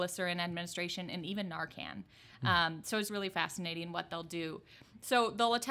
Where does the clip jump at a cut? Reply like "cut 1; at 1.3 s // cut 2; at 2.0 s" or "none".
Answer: cut 1; at 3.1 s